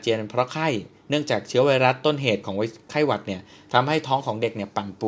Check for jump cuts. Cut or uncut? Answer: uncut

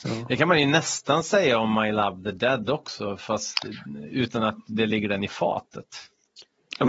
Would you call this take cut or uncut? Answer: uncut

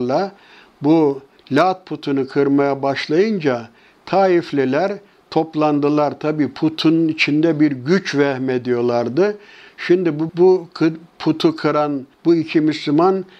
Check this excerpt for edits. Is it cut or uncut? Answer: cut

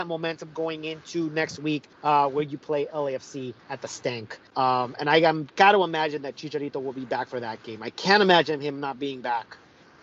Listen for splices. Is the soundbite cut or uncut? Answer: cut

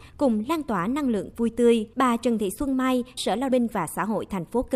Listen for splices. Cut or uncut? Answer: cut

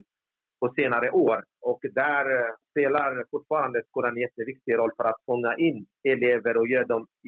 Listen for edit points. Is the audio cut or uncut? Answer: uncut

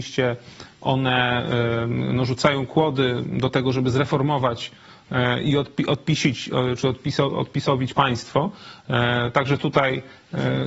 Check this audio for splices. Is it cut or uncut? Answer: uncut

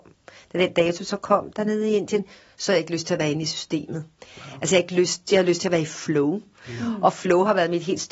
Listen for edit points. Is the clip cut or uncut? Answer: uncut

